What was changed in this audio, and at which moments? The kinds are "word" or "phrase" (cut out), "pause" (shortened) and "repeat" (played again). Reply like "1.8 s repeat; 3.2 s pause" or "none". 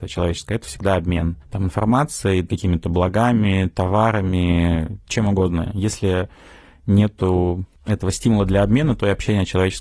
none